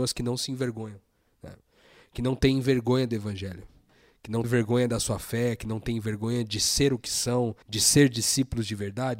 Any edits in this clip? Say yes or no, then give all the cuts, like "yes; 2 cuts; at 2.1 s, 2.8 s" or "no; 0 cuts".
yes; 2 cuts; at 4.4 s, 7.6 s